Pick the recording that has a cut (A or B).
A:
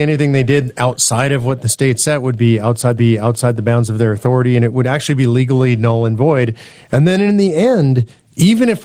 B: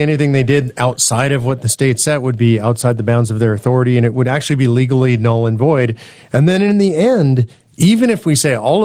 A